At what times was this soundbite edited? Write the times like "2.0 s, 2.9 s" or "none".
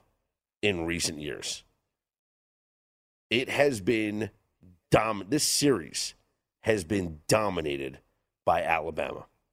none